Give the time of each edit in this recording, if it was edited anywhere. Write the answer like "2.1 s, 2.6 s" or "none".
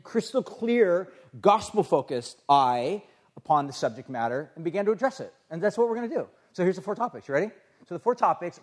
none